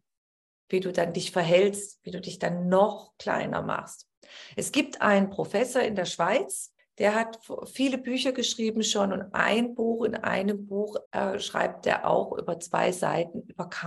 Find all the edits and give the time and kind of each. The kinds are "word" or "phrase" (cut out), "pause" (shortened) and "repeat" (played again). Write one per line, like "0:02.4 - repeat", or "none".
0:06.8 - pause
0:11.1 - pause